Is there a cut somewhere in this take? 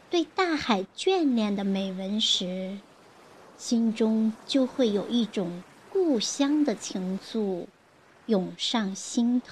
no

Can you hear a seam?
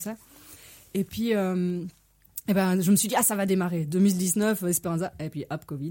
no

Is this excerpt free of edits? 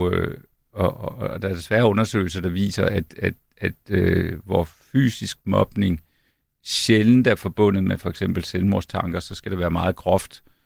yes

